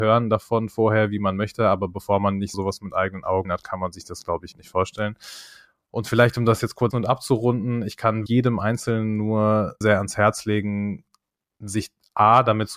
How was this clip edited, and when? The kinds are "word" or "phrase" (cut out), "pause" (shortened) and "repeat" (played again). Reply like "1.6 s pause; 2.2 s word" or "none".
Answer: 2.5 s word; 3.4 s word; 4.5 s word; 6.9 s word; 8.3 s word; 9.8 s word